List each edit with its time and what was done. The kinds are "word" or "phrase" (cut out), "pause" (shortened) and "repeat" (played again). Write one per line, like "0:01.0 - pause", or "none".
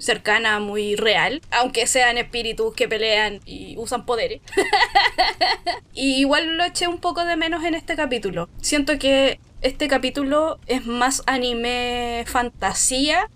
none

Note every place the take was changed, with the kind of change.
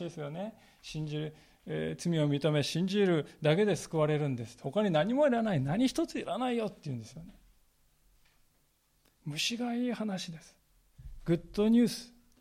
none

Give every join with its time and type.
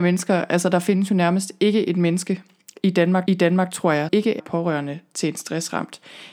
0:03.3 - repeat
0:04.1 - word
0:04.4 - word

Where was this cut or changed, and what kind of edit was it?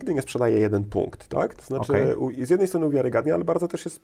none

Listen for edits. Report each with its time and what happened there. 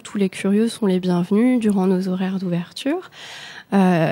none

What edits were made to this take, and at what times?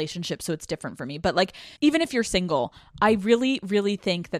0:01.8 - pause

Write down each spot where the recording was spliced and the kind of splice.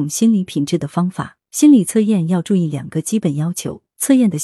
0:01.4 - pause

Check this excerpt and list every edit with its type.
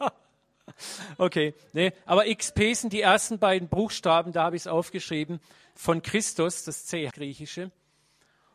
0:07.1 - phrase

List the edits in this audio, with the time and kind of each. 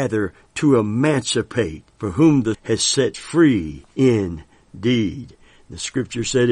0:01.9 - pause
0:02.5 - word
0:03.1 - phrase
0:03.9 - pause

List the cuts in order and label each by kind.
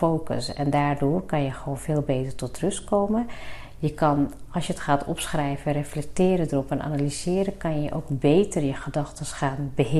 none

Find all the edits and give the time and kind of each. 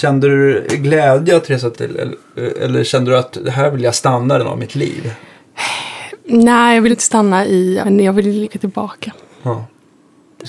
0:01.7 - word
0:04.4 - word
0:06.9 - word
0:07.8 - word
0:08.4 - word

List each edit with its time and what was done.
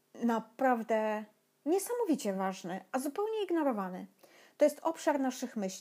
none

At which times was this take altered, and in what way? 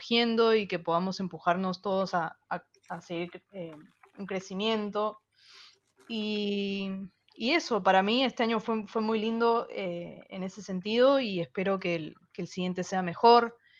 none

